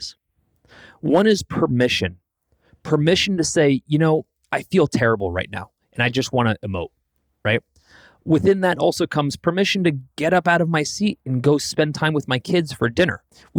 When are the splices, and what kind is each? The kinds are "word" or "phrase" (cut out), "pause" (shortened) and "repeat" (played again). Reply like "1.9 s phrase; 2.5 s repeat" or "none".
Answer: none

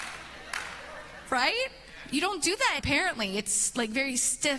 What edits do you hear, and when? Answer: 2.8 s word

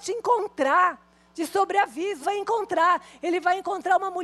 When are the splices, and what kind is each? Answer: 2.2 s word

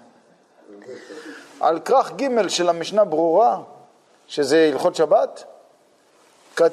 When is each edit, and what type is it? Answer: none

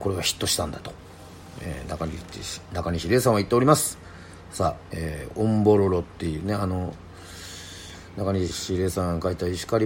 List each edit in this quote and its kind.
none

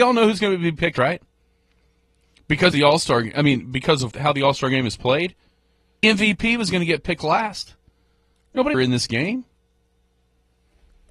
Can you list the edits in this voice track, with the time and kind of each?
0.9 s word; 2.7 s word; 4.1 s word; 6.0 s word; 8.7 s phrase

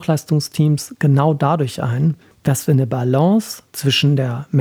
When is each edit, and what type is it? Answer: none

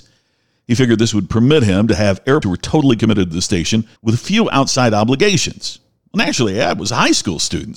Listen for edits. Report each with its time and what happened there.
2.4 s word; 4.0 s pause

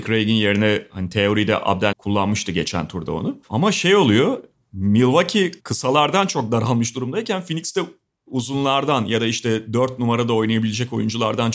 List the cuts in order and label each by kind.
1.9 s phrase; 3.4 s pause; 5.6 s pause

